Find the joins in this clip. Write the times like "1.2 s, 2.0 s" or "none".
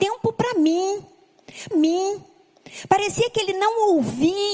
1.7 s